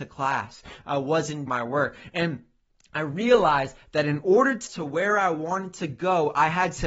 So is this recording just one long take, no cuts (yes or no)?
no